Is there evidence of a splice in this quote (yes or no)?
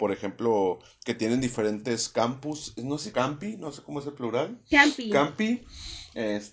yes